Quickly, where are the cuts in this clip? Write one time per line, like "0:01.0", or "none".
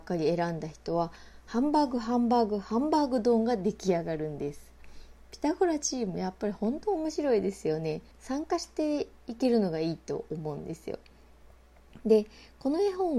0:08.1